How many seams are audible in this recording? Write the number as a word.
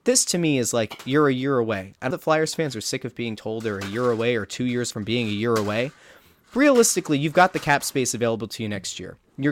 three